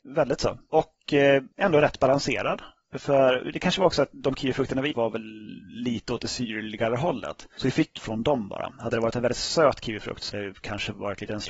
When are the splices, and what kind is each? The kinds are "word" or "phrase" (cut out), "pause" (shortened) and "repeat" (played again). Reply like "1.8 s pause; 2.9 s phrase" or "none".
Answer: 1.5 s pause; 4.9 s word; 8.0 s phrase; 10.3 s word